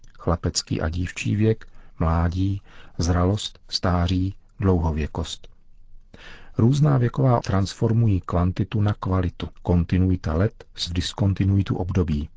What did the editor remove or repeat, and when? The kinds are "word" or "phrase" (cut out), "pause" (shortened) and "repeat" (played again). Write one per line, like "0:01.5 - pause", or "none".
0:01.9 - word
0:07.4 - word
0:09.5 - pause
0:10.9 - word